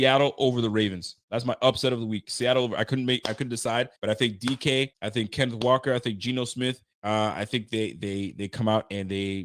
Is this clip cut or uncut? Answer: cut